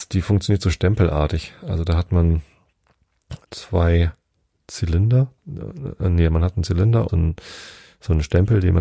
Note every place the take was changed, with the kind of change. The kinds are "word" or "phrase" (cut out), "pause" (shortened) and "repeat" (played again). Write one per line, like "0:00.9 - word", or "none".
0:03.4 - word
0:05.4 - pause
0:07.1 - word